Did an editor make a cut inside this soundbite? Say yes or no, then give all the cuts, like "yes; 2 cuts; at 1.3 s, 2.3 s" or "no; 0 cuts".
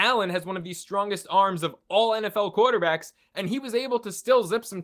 no; 0 cuts